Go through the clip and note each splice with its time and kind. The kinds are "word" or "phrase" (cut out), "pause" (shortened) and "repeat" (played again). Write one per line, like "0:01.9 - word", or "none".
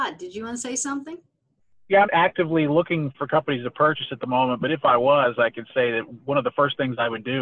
0:02.1 - word
0:03.1 - word